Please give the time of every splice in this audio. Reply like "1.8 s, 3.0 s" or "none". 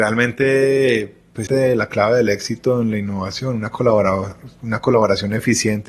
1.5 s